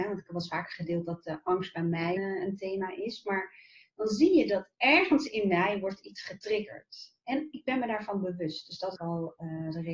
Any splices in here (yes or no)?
yes